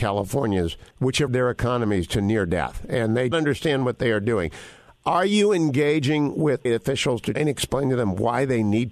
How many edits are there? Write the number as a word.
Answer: five